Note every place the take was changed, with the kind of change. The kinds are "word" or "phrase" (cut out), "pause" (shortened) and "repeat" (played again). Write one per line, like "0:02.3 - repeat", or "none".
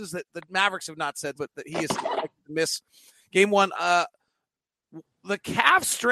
0:01.4 - word

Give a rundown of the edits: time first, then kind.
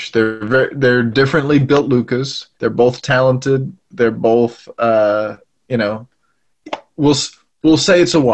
0:02.5 - pause

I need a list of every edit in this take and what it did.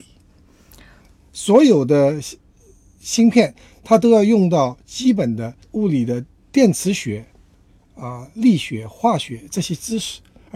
0:05.6 - pause

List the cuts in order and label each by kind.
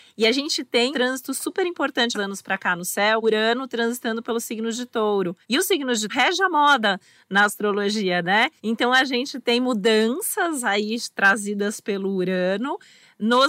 0:00.9 - word
0:02.1 - phrase
0:03.2 - phrase
0:05.4 - pause
0:06.1 - word
0:08.6 - pause

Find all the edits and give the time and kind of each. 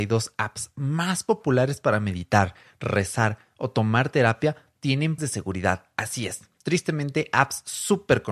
0:05.2 - word

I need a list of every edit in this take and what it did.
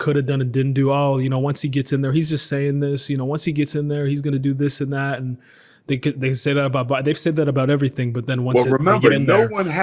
none

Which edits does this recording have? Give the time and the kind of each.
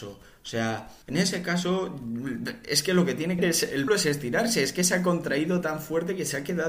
0:01.0 - pause
0:03.4 - word
0:03.9 - word

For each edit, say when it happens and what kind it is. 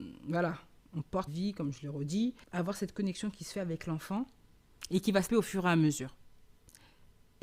0:01.3 - word
0:05.3 - word

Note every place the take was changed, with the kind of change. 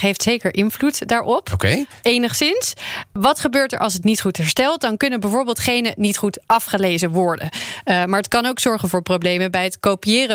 none

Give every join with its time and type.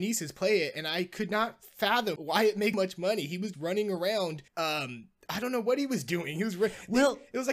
0:02.2 - word
0:02.7 - word
0:03.5 - word
0:04.5 - pause

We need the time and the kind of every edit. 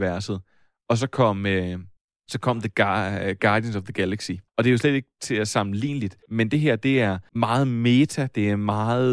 0:02.0 - pause
0:04.5 - pause
0:06.2 - pause
0:07.3 - pause

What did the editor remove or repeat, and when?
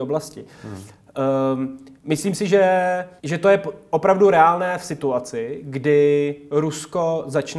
0:02.0 - pause
0:03.2 - pause

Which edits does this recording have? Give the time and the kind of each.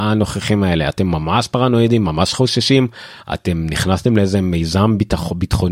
none

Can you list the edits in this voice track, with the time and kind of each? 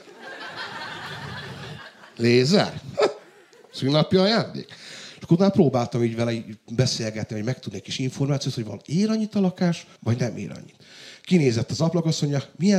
0:10.0 - pause

